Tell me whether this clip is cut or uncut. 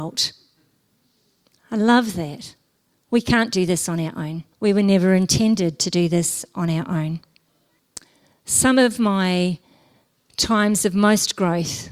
cut